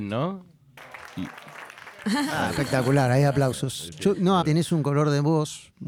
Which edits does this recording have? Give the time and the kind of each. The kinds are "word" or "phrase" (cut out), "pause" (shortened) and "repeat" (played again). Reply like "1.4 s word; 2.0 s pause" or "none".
4.4 s word

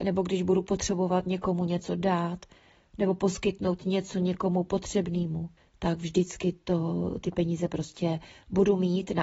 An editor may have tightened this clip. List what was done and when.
5.6 s pause

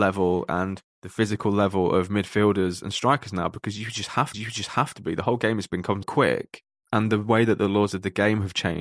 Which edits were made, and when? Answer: 4.3 s repeat; 6.0 s word

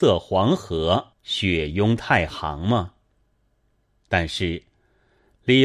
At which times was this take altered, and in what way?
1.1 s pause

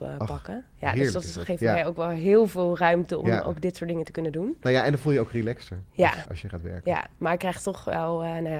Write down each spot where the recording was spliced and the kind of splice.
6.3 s word

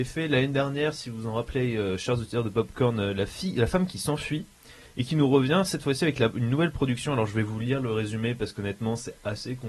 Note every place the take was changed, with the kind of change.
none

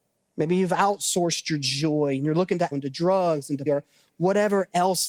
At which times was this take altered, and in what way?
2.7 s word; 3.7 s word

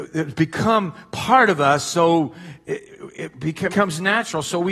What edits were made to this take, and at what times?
3.7 s word

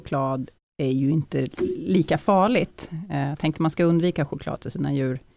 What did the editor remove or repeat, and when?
none

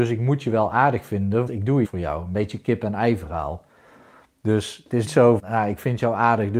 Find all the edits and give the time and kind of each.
1.5 s word; 1.8 s word; 5.1 s word; 5.4 s word

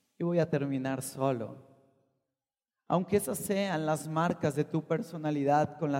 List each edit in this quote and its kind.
none

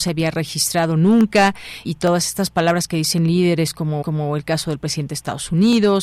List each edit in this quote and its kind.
1.8 s word; 4.0 s repeat

